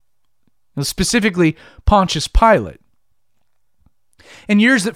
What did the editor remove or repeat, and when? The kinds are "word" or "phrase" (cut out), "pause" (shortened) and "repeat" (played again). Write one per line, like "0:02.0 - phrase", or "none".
none